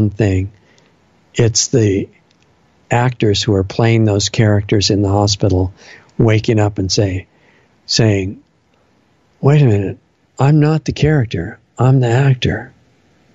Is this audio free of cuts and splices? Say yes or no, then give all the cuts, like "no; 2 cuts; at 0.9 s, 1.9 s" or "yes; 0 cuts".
yes; 0 cuts